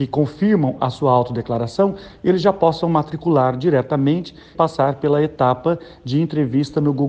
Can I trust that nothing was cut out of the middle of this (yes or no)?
no